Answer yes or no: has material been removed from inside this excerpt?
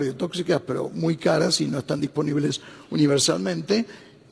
no